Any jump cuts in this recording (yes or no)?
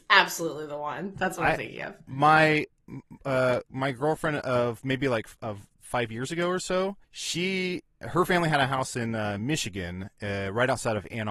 yes